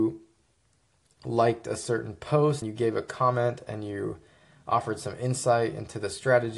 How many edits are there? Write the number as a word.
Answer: one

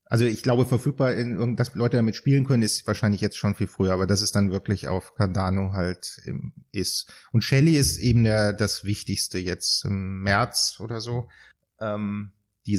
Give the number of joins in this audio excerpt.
zero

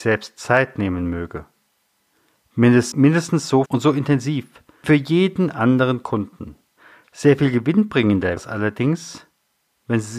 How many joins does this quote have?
five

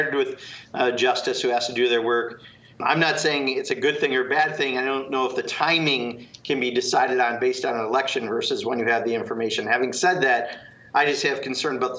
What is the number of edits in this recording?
zero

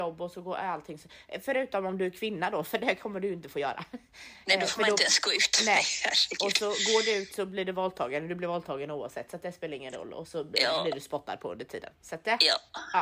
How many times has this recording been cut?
one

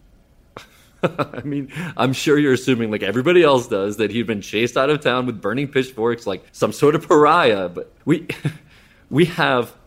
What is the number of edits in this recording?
two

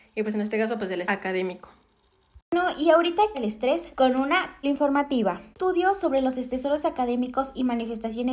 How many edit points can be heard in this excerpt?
five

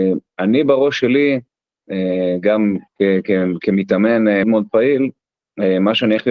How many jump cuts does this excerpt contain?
two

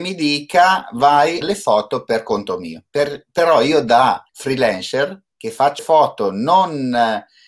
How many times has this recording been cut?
three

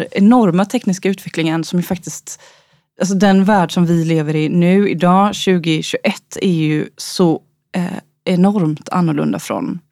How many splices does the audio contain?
zero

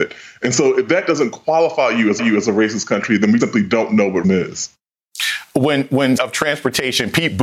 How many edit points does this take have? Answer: four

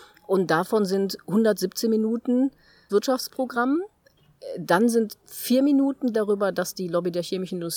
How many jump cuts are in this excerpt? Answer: three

